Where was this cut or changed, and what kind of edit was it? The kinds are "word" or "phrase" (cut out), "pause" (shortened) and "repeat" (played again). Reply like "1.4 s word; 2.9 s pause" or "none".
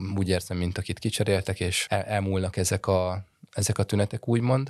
none

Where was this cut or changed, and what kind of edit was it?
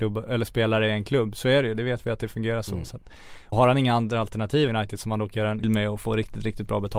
3.5 s word; 4.7 s phrase; 5.6 s word

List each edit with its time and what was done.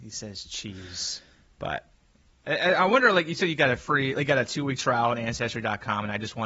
none

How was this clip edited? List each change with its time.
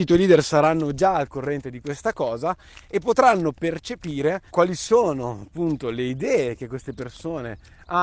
4.5 s pause

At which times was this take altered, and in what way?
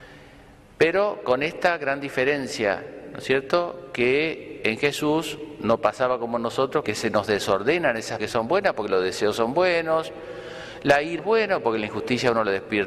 4.6 s word; 6.8 s word; 8.2 s word; 11.2 s phrase

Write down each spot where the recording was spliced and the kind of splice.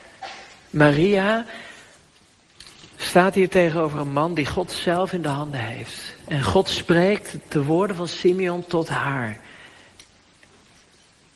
7.5 s word

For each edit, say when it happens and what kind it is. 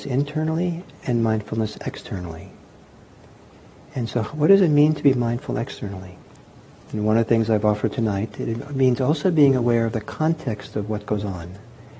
1.0 s pause

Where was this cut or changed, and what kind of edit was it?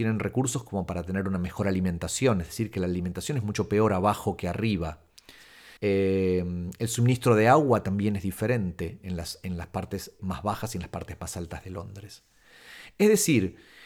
5.8 s pause; 10.2 s word

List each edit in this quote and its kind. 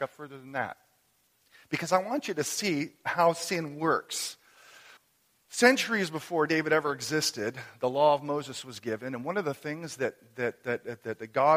5.0 s pause

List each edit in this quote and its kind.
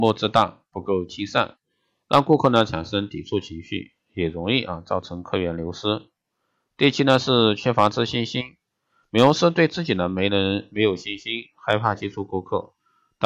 none

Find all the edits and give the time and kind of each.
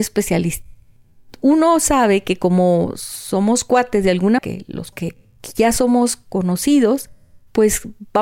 4.4 s word; 4.9 s word; 5.2 s pause

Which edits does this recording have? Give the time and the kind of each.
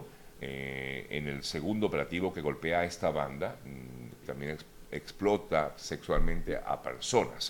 4.2 s phrase

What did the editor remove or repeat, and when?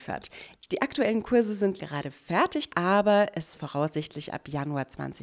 1.8 s word; 2.7 s word; 3.5 s word

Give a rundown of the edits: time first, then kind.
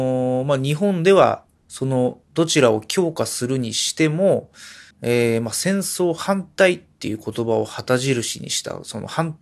2.2 s pause; 4.9 s pause

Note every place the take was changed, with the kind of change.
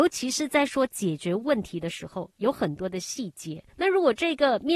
none

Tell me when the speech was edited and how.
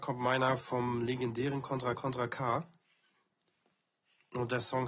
1.9 s repeat

